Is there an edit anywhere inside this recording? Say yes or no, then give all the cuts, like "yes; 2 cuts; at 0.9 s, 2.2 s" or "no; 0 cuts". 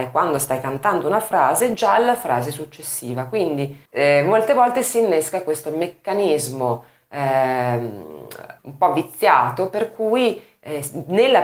yes; 2 cuts; at 3.8 s, 8.6 s